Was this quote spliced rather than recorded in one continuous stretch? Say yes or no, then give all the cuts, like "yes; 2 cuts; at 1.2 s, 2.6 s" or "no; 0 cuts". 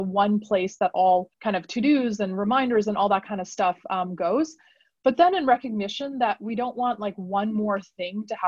yes; 1 cut; at 1.3 s